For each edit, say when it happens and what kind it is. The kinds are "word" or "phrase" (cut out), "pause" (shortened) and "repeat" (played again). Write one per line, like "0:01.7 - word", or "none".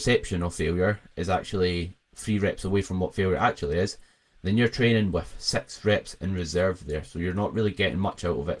0:02.1 - pause